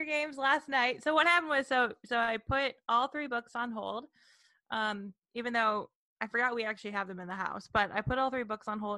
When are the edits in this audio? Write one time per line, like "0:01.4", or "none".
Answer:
none